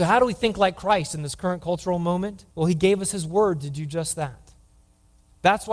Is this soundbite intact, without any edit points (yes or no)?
no